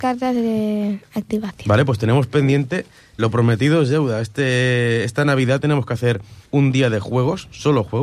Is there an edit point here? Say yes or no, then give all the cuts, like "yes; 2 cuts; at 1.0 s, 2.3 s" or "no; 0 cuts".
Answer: yes; 2 cuts; at 3.2 s, 6.4 s